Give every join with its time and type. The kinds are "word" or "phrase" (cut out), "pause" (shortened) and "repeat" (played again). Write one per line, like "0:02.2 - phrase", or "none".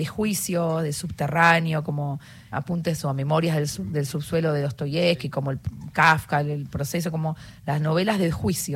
0:02.5 - word